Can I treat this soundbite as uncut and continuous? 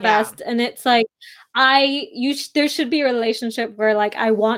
yes; 0 cuts

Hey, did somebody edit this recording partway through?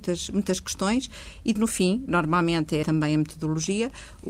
yes; 3 cuts; at 1.6 s, 2.1 s, 2.8 s

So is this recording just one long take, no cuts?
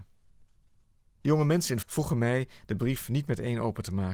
no; 1 cut; at 1.8 s

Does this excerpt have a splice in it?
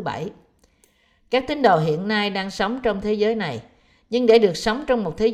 no; 0 cuts

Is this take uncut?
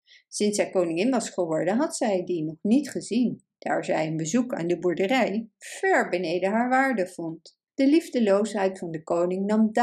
no; 1 cut; at 7.7 s

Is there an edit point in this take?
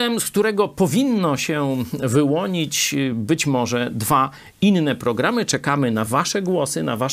no; 0 cuts

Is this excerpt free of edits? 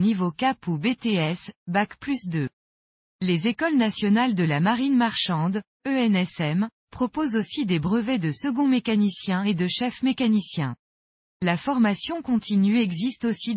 yes; 0 cuts

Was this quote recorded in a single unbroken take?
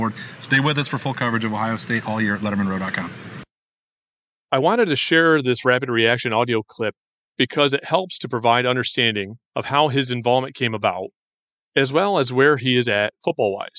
no; 1 cut; at 9.5 s

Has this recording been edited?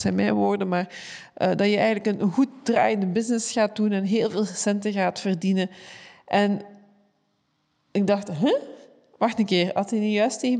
no; 0 cuts

